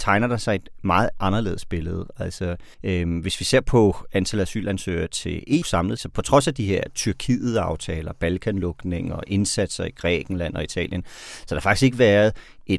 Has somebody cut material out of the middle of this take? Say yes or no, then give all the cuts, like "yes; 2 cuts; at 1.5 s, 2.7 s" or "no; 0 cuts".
yes; 3 cuts; at 2.7 s, 5.6 s, 6.0 s